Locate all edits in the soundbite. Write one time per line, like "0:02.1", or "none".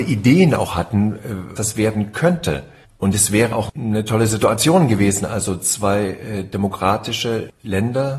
0:01.6
0:02.8
0:03.5